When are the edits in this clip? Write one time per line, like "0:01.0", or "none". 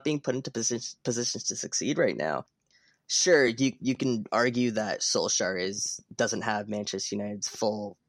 none